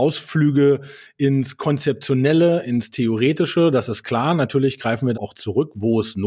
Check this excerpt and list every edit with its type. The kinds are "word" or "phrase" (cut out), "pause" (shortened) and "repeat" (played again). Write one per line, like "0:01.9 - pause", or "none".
0:05.1 - word